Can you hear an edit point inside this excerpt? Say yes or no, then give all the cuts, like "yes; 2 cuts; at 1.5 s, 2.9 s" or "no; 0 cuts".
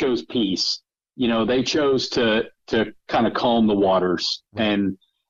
no; 0 cuts